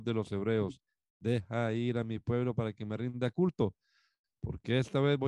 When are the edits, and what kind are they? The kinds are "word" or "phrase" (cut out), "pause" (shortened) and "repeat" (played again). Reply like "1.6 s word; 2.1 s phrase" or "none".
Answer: none